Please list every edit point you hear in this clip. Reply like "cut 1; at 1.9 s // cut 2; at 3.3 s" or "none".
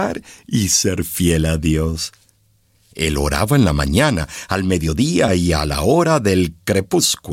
none